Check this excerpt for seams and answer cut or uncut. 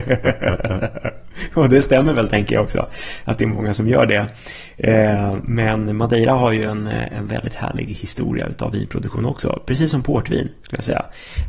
uncut